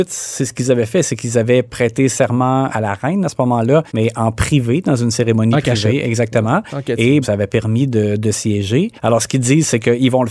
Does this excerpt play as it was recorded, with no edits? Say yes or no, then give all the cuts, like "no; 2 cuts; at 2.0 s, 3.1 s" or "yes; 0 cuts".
no; 4 cuts; at 2.7 s, 3.9 s, 7.2 s, 9.0 s